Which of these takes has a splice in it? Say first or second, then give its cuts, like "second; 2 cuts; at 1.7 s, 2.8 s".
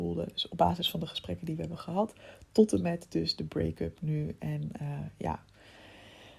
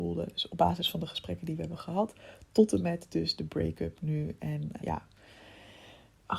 second; 1 cut; at 4.8 s